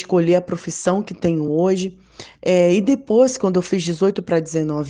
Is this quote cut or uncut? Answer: uncut